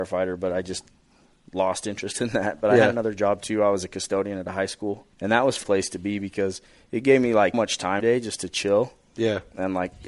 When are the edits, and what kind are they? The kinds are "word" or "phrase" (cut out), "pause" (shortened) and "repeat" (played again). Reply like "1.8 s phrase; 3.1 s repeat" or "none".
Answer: 5.1 s pause; 5.6 s phrase; 6.7 s pause; 7.5 s word; 8.0 s word